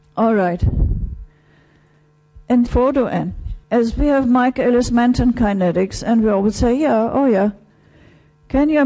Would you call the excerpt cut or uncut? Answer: cut